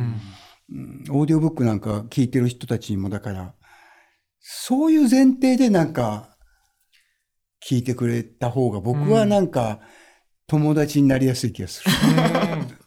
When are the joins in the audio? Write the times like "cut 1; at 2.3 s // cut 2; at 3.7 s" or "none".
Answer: none